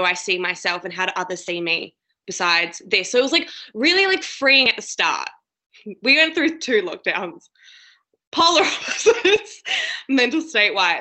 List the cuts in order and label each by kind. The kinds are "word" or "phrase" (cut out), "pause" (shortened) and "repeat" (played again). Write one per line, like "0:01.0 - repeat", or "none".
none